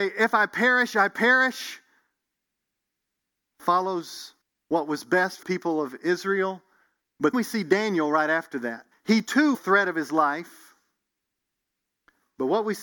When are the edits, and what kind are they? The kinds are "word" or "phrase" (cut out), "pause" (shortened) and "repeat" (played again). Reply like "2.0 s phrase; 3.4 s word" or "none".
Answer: 4.4 s pause; 5.4 s word; 7.3 s word; 8.9 s pause; 9.5 s phrase